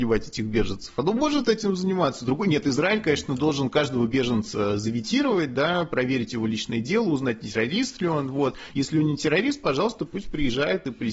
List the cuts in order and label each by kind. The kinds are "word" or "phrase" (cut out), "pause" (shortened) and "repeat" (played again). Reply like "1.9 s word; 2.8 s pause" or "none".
none